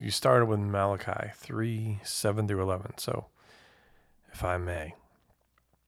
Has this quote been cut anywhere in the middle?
no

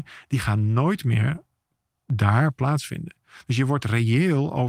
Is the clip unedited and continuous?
yes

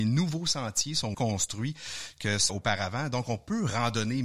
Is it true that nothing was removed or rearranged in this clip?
no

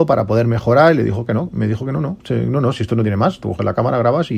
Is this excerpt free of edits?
yes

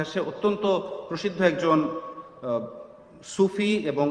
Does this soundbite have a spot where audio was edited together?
no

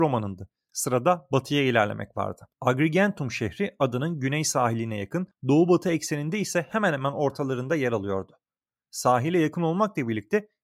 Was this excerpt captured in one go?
yes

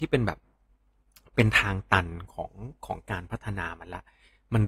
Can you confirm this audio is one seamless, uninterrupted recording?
yes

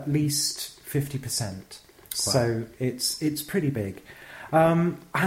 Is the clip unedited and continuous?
yes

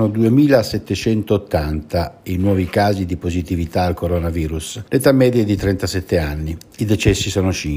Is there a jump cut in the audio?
yes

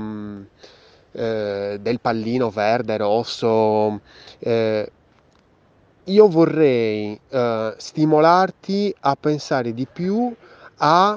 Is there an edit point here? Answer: no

